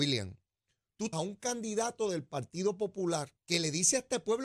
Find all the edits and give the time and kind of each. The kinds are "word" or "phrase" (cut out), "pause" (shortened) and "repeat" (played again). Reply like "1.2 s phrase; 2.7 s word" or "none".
1.1 s word; 3.4 s pause